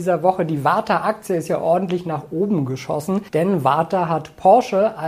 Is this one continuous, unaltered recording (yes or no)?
no